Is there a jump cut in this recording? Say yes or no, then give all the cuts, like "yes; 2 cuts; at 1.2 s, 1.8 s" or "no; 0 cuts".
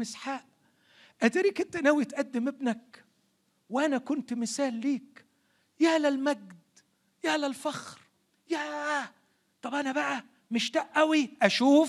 no; 0 cuts